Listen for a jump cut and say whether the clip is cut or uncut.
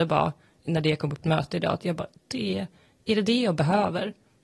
cut